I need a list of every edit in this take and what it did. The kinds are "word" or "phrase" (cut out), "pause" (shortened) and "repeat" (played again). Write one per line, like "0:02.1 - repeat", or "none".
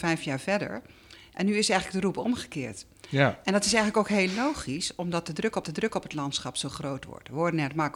0:05.6 - repeat